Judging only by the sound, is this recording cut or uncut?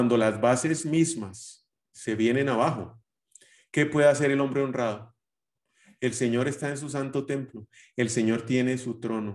uncut